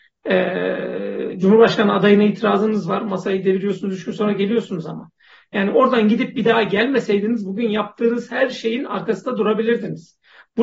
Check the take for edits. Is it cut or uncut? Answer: uncut